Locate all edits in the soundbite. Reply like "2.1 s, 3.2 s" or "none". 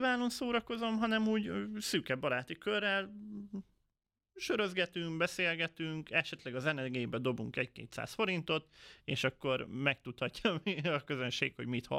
none